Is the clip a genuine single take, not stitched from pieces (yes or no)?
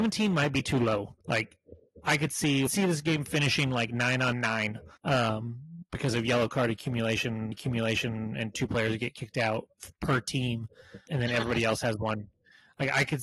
no